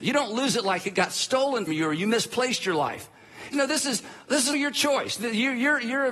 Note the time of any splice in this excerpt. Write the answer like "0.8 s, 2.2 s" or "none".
1.7 s, 3.5 s, 4.5 s